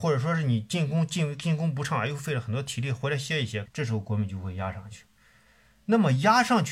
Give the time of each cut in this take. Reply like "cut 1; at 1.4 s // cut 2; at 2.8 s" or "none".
cut 1; at 3.7 s